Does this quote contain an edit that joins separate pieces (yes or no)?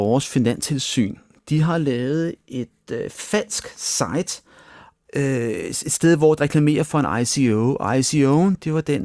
yes